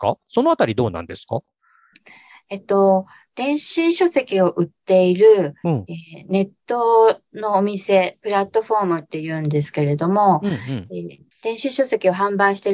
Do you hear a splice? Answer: no; 0 cuts

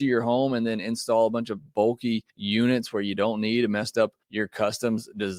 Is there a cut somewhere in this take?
yes; 2 cuts; at 2.3 s, 4.2 s

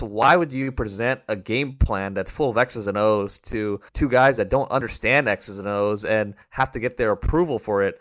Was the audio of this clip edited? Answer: yes; 1 cut; at 3.9 s

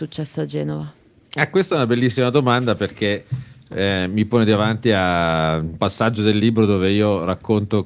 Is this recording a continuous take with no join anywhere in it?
yes; 0 cuts

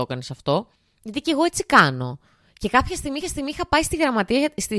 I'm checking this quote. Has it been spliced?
yes; 1 cut; at 3.2 s

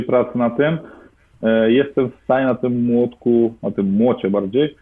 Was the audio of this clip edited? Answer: no; 0 cuts

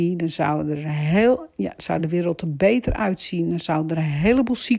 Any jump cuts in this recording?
no; 0 cuts

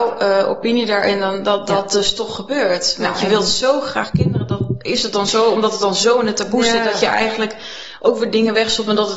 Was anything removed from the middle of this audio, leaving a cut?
no; 0 cuts

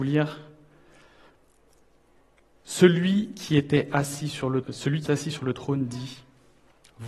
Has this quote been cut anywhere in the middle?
yes; 2 cuts; at 4.6 s, 5.1 s

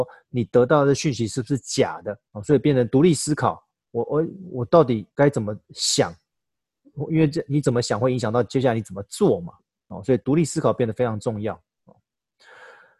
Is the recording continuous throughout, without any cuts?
no; 2 cuts; at 2.3 s, 5.1 s

